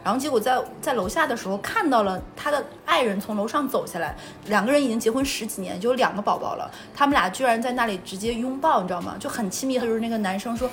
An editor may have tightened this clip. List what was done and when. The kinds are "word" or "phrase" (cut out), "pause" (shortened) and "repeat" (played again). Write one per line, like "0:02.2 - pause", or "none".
0:09.8 - phrase

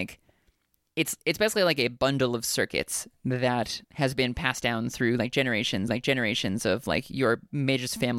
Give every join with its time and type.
0:03.8 - pause
0:05.9 - repeat

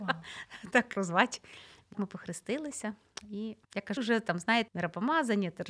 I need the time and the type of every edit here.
0:01.0 - word
0:01.9 - word
0:03.6 - pause
0:04.0 - word
0:04.7 - word

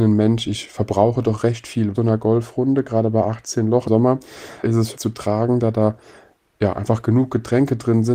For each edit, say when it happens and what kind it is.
0:01.9 - phrase
0:03.9 - word
0:04.6 - word
0:05.0 - phrase

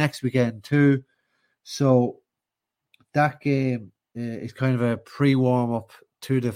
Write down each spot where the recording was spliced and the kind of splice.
none

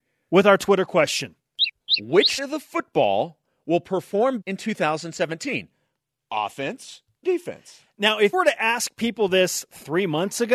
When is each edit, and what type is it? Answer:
0:02.4 - word
0:04.4 - word
0:07.2 - word
0:08.3 - word

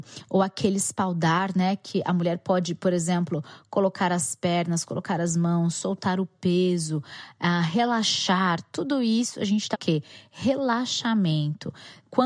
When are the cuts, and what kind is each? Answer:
0:09.7 - word

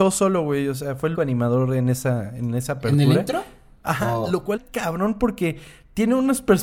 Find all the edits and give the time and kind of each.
0:01.1 - word
0:04.6 - word

